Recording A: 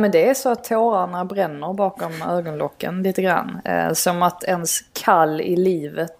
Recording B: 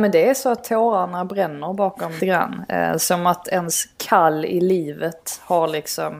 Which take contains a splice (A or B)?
B